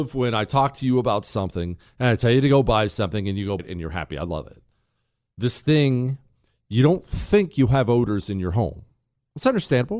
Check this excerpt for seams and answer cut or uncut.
cut